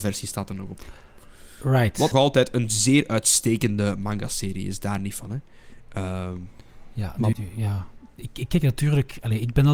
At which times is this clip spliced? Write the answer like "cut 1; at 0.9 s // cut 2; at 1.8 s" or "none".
cut 1; at 2.1 s // cut 2; at 7.3 s